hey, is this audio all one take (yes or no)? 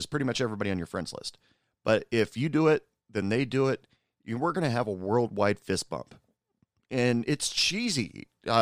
yes